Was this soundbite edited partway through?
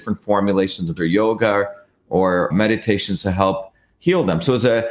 yes; 2 cuts; at 1.0 s, 2.5 s

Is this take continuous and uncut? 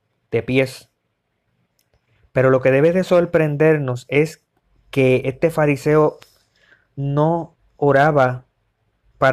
yes; 0 cuts

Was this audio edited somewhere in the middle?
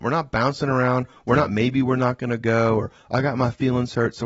no; 0 cuts

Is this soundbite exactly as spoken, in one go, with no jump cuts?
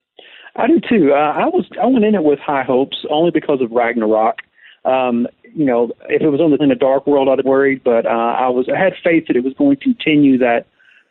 no; 3 cuts; at 6.6 s, 7.4 s, 9.8 s

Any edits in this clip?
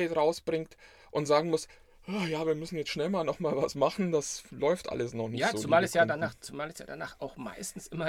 no; 0 cuts

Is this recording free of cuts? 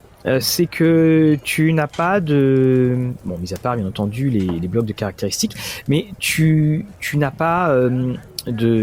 yes; 0 cuts

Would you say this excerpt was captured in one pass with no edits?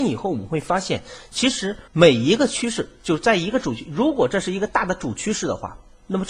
no; 1 cut; at 1.9 s

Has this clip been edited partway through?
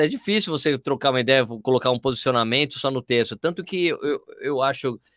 no; 0 cuts

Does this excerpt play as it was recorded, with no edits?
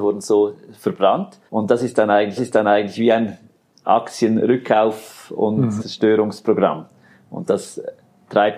no; 3 cuts; at 1.5 s, 2.4 s, 5.8 s

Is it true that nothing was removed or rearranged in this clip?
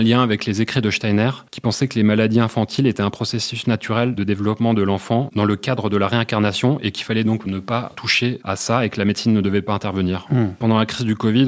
yes; 0 cuts

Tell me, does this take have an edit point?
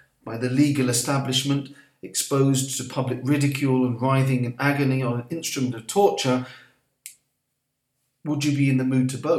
no; 0 cuts

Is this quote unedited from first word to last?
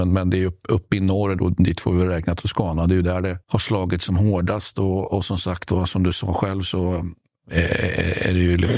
no; 1 cut; at 3.4 s

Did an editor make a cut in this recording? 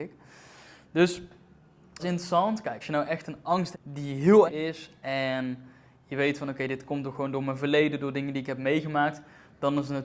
yes; 4 cuts; at 2.0 s, 2.8 s, 3.7 s, 4.5 s

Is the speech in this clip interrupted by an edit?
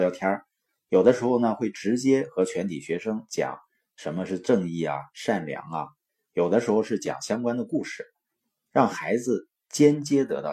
no; 0 cuts

